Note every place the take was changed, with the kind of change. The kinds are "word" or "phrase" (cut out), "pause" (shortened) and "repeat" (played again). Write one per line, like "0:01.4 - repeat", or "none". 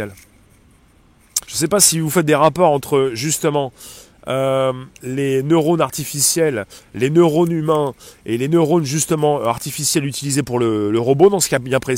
0:01.4 - pause
0:04.9 - pause